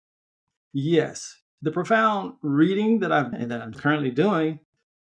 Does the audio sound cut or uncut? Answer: cut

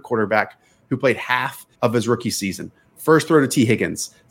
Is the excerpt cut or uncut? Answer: cut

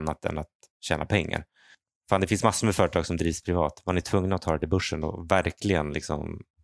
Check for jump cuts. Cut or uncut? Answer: uncut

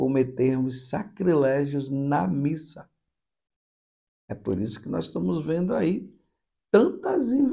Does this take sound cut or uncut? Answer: uncut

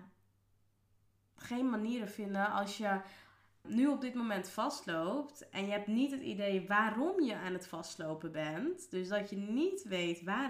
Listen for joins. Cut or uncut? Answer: cut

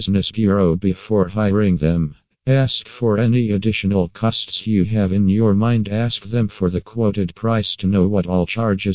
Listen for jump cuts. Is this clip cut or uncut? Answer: uncut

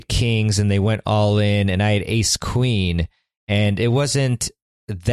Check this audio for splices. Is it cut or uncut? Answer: uncut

